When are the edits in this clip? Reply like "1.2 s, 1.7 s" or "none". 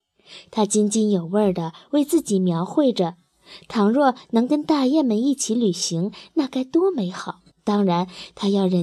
7.5 s